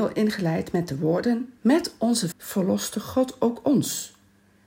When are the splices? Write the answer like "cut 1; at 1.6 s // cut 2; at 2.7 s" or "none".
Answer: cut 1; at 1.6 s // cut 2; at 2.3 s